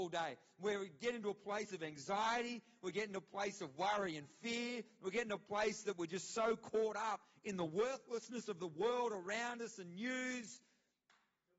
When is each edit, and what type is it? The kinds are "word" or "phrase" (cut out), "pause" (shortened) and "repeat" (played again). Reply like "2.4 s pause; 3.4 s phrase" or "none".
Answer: none